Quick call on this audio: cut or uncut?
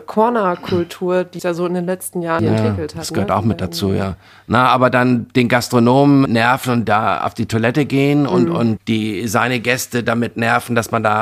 cut